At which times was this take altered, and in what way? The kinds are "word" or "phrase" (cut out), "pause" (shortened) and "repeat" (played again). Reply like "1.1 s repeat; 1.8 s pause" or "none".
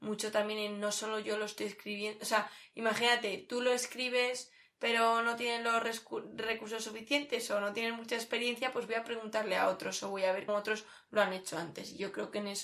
10.5 s word